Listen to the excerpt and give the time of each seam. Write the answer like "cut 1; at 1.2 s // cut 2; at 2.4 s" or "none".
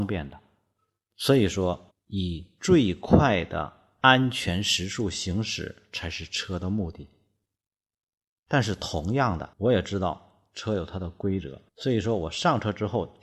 cut 1; at 1.9 s // cut 2; at 9.5 s // cut 3; at 11.7 s